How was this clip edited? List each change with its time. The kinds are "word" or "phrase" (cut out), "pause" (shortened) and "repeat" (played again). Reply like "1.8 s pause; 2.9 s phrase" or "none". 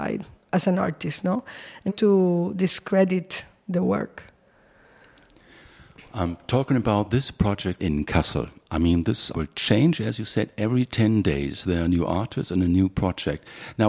1.9 s phrase; 7.8 s word; 9.3 s word